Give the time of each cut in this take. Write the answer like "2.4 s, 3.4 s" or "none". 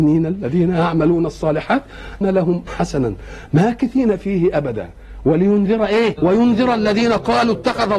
2.2 s, 2.7 s, 6.2 s